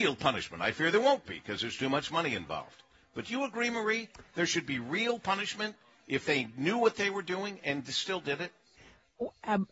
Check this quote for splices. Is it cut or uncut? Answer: uncut